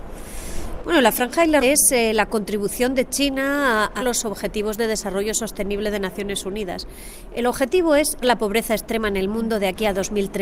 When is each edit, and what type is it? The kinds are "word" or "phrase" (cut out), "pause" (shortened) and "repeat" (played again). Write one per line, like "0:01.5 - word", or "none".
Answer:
0:01.6 - word
0:04.0 - word
0:08.2 - word